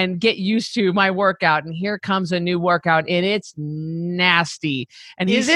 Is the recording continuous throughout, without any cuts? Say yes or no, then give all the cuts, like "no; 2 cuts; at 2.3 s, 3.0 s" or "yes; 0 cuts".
yes; 0 cuts